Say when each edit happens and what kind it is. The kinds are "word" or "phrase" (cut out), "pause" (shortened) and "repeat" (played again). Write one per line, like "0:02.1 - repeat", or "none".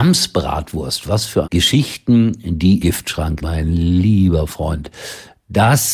0:01.4 - phrase
0:02.8 - word
0:03.4 - word